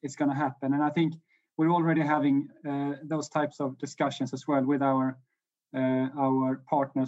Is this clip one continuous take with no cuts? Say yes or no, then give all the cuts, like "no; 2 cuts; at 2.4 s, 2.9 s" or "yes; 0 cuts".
yes; 0 cuts